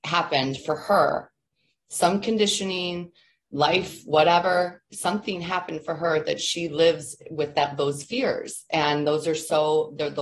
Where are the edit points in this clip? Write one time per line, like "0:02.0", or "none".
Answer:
none